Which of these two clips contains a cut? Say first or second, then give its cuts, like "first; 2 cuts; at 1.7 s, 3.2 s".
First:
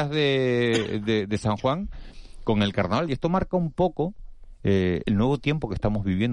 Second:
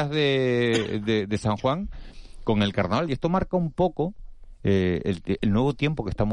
first; 1 cut; at 5.0 s